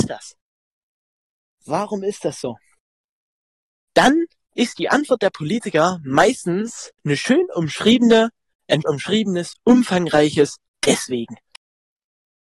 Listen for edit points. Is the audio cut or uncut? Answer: cut